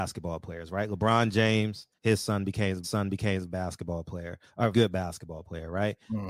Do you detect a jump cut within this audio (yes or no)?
yes